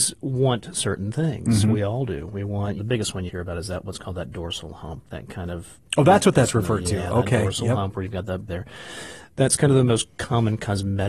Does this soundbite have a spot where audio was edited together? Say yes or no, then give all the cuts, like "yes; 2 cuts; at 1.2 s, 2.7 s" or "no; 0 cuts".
yes; 3 cuts; at 2.8 s, 3.3 s, 8.5 s